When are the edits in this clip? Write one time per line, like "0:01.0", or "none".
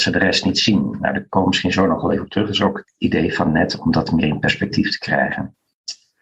none